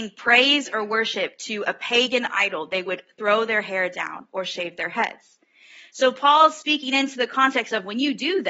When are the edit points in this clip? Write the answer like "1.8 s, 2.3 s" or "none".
none